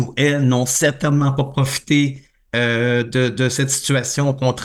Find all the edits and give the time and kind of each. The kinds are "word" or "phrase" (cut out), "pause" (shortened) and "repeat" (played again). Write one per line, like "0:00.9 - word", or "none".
none